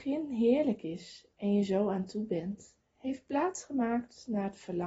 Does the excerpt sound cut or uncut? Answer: uncut